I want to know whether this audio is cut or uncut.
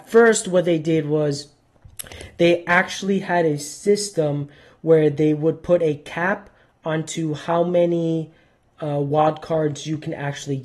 uncut